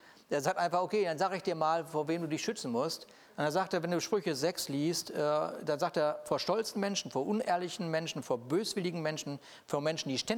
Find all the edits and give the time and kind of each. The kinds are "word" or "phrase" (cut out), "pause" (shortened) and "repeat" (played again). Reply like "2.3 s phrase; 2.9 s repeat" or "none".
none